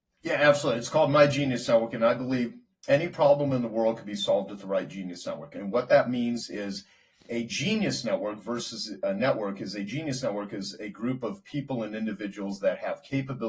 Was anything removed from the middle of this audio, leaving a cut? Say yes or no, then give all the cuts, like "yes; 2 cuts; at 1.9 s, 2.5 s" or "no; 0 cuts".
no; 0 cuts